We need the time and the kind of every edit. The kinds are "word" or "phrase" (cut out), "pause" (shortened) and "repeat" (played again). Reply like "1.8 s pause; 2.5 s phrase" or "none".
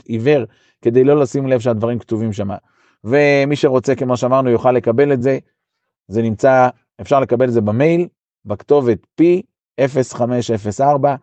none